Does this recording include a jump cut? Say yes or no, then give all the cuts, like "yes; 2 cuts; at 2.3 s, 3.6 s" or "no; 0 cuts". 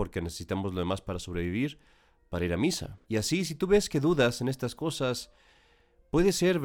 yes; 1 cut; at 3.0 s